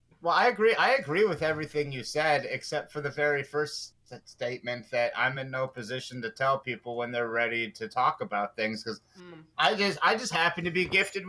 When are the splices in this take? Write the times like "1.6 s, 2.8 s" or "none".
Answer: none